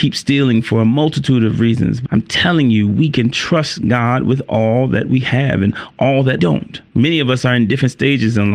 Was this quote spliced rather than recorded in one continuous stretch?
yes; 3 cuts; at 2.1 s, 6.4 s, 6.9 s

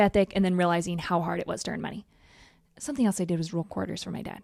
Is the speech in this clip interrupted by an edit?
no; 0 cuts

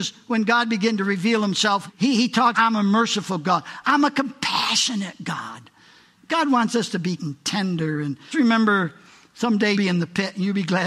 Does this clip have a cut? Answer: yes; 5 cuts; at 1.9 s, 2.5 s, 7.2 s, 8.3 s, 9.7 s

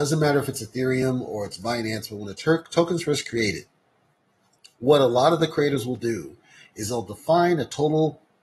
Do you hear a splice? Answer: no; 0 cuts

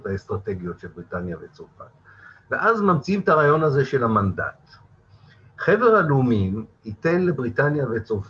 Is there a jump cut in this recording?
no; 0 cuts

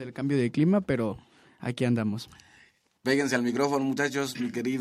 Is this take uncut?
yes; 0 cuts

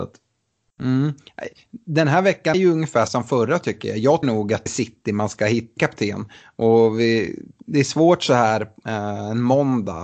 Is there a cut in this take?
yes; 5 cuts; at 2.5 s, 3.1 s, 4.2 s, 4.7 s, 5.8 s

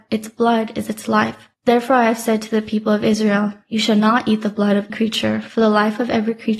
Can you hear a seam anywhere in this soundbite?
yes; 1 cut; at 4.9 s

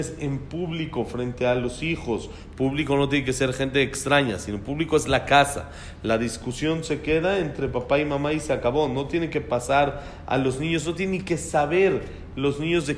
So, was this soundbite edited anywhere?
no; 0 cuts

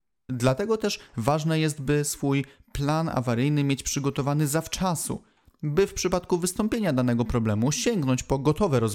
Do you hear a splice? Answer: no; 0 cuts

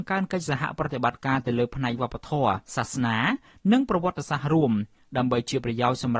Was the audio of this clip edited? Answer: yes; 1 cut; at 2.7 s

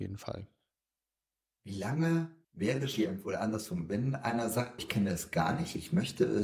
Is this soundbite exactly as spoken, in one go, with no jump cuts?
no; 2 cuts; at 2.4 s, 4.8 s

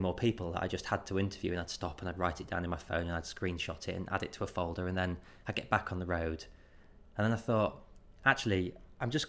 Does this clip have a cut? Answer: no; 0 cuts

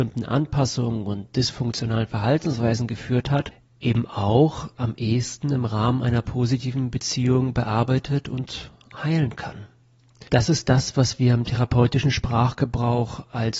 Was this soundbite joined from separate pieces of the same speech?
yes; 1 cut; at 10.3 s

